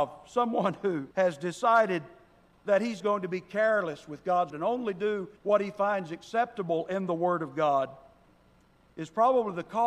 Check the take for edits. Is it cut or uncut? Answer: cut